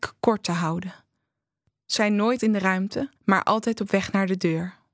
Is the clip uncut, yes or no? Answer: no